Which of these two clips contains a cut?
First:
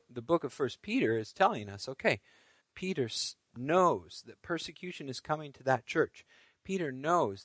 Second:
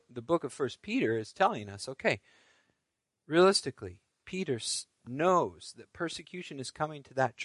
first; 1 cut; at 2.6 s

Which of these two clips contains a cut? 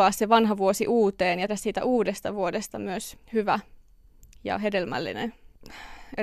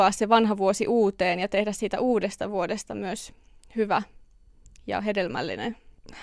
first; 2 cuts; at 1.5 s, 3.2 s

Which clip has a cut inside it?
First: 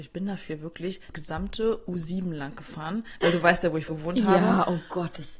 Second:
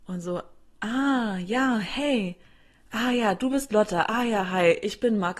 first; 2 cuts; at 1.1 s, 3.9 s

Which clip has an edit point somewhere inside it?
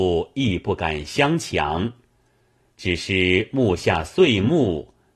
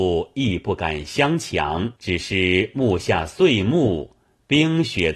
second; 1 cut; at 2.0 s

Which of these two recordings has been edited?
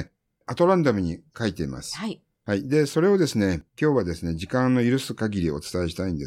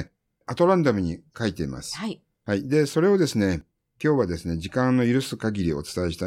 first; 1 cut; at 3.7 s

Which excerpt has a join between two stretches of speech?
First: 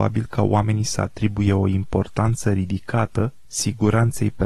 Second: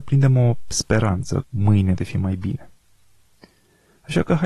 second; 2 cuts; at 1.4 s, 2.0 s

